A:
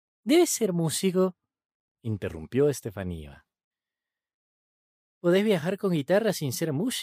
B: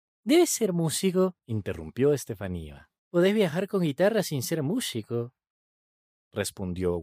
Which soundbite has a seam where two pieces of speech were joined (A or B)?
B